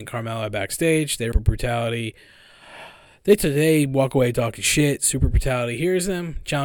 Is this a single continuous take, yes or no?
no